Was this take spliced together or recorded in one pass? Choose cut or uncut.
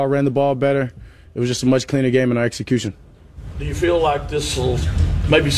uncut